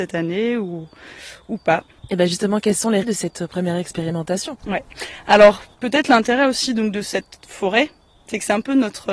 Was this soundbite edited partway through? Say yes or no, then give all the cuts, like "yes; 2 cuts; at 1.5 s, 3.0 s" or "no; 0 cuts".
yes; 1 cut; at 3.0 s